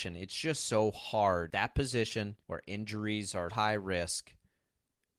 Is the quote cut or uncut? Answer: cut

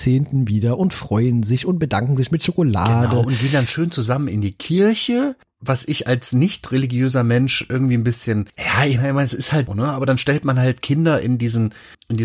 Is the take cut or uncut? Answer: cut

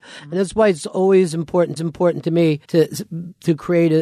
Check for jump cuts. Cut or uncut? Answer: cut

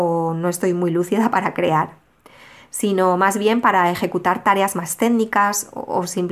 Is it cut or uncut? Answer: uncut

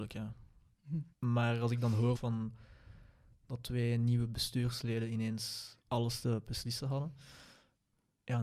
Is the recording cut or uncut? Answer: cut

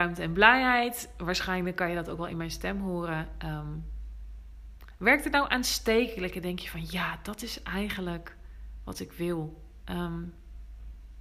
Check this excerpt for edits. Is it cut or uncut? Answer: uncut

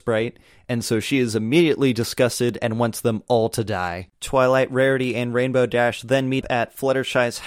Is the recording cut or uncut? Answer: cut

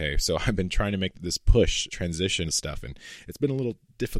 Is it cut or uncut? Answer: cut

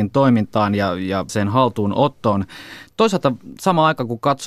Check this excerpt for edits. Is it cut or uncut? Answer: cut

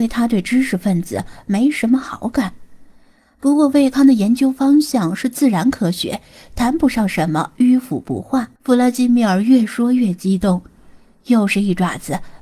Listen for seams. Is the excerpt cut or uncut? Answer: cut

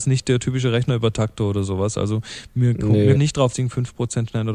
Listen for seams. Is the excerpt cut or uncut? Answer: cut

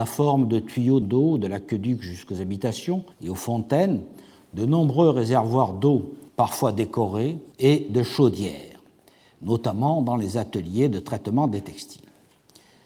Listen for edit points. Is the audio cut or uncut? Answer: cut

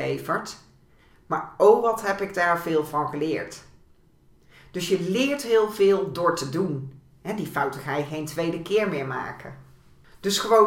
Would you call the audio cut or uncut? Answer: uncut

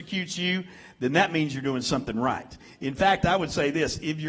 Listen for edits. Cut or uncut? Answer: uncut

